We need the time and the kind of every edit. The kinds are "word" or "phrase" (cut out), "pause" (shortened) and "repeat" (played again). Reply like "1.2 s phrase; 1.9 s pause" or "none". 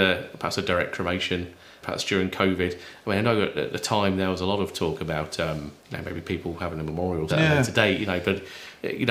1.8 s word; 5.8 s pause; 7.3 s word